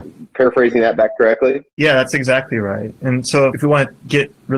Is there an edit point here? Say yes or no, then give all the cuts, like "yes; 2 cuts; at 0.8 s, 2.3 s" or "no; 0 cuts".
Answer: yes; 2 cuts; at 1.7 s, 3.5 s